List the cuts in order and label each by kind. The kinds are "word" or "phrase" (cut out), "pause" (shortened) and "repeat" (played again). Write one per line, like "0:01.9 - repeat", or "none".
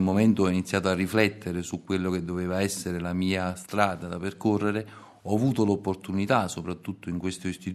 none